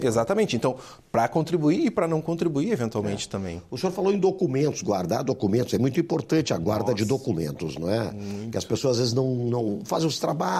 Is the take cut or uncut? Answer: uncut